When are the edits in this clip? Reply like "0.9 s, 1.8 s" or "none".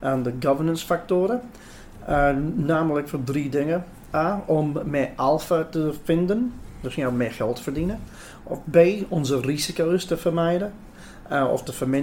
none